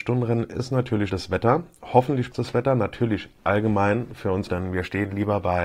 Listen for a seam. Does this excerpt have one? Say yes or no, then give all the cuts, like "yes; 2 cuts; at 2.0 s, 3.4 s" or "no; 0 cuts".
yes; 3 cuts; at 1.1 s, 2.3 s, 4.5 s